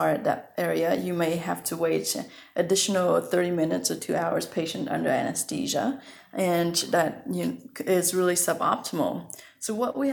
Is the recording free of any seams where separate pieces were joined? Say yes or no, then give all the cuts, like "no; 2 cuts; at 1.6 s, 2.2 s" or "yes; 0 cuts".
yes; 0 cuts